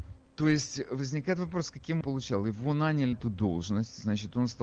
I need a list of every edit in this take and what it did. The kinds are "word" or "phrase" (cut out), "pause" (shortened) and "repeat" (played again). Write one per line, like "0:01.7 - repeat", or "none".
0:02.0 - phrase
0:03.1 - word